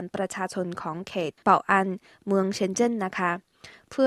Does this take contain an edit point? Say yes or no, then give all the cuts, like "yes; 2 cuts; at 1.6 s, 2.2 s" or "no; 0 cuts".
no; 0 cuts